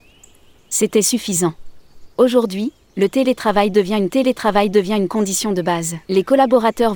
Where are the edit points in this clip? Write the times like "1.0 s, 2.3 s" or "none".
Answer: 2.1 s, 4.1 s, 6.0 s